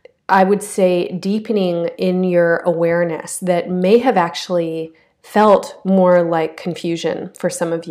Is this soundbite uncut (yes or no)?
yes